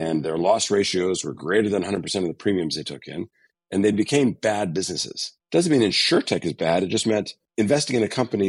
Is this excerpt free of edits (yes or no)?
yes